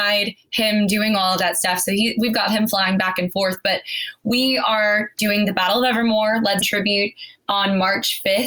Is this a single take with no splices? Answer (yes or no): no